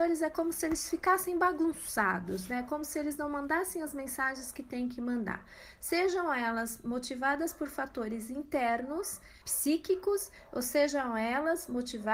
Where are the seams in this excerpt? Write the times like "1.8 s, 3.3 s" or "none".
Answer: 9.4 s